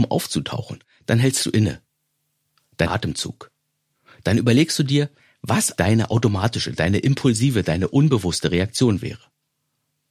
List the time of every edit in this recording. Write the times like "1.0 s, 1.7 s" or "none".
2.8 s, 5.8 s